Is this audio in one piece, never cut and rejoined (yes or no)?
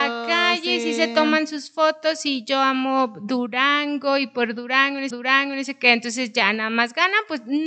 no